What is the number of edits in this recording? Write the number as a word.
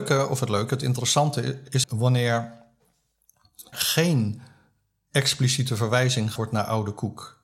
three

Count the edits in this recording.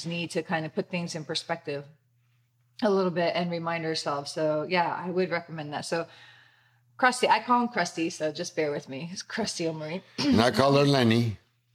zero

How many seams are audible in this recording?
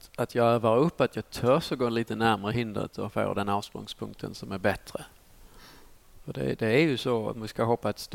zero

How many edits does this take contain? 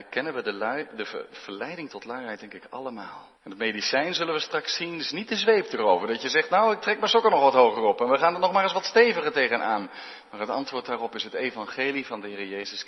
one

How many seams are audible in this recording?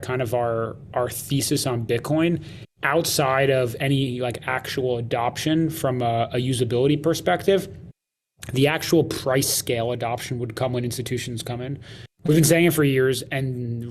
one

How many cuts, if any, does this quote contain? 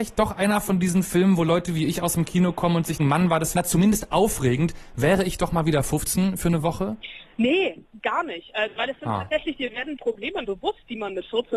four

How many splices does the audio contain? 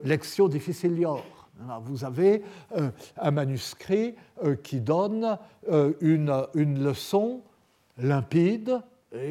zero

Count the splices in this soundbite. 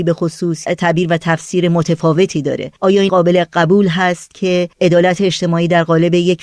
three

